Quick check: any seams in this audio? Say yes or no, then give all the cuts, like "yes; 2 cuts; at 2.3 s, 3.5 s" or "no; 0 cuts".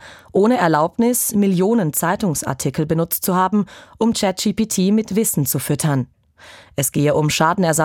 no; 0 cuts